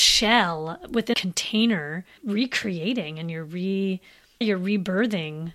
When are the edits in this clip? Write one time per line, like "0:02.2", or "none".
0:01.1
0:02.2
0:04.4